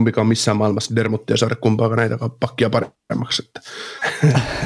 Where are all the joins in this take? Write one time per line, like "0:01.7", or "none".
none